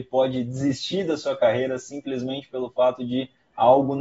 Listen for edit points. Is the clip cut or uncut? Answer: uncut